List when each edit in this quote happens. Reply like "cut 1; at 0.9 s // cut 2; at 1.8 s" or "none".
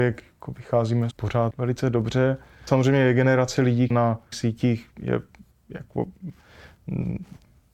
cut 1; at 1.1 s // cut 2; at 1.5 s // cut 3; at 2.7 s // cut 4; at 3.9 s // cut 5; at 4.3 s

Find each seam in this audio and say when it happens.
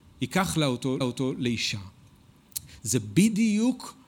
cut 1; at 1.0 s

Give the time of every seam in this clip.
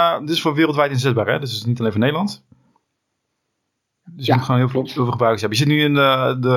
none

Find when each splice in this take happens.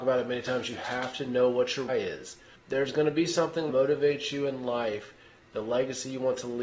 cut 1; at 1.9 s // cut 2; at 3.7 s

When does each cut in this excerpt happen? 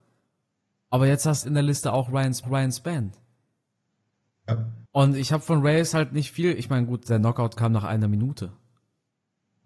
cut 1; at 1.4 s // cut 2; at 2.4 s // cut 3; at 4.9 s // cut 4; at 6.3 s

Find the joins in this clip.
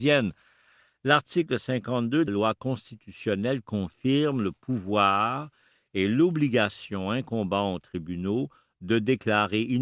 cut 1; at 2.3 s

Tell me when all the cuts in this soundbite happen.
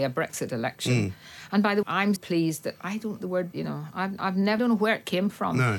cut 1; at 1.8 s // cut 2; at 2.2 s // cut 3; at 3.2 s // cut 4; at 3.5 s // cut 5; at 4.6 s

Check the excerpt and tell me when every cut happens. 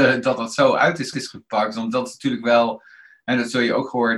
cut 1; at 1.1 s

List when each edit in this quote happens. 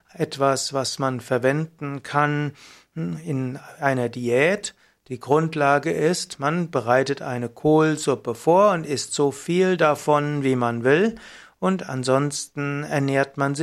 none

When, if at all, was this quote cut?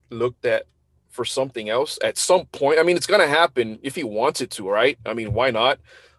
none

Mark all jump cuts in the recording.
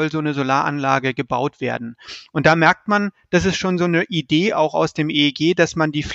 none

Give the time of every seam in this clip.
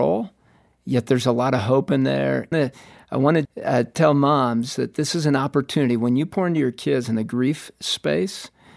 cut 1; at 2.5 s // cut 2; at 3.4 s

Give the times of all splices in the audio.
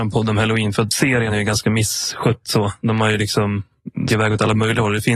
cut 1; at 1.3 s // cut 2; at 4.1 s

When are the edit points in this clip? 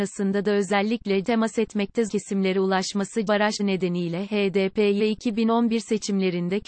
cut 1; at 1.2 s // cut 2; at 2.1 s // cut 3; at 3.3 s // cut 4; at 3.6 s // cut 5; at 5.0 s

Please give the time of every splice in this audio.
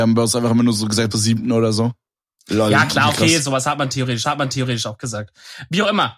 cut 1; at 1.1 s // cut 2; at 4.2 s

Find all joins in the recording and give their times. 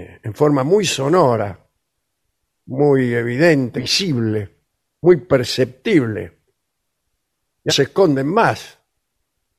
cut 1; at 3.8 s // cut 2; at 7.7 s

